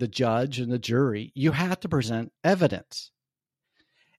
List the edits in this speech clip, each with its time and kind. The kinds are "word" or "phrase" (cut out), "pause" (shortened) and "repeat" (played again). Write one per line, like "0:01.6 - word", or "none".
0:02.4 - pause